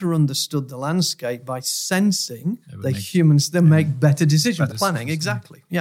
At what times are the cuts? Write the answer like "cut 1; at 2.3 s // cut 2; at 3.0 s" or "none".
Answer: cut 1; at 2.6 s // cut 2; at 4.7 s